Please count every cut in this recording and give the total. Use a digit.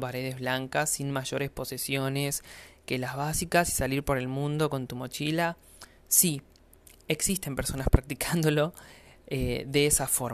0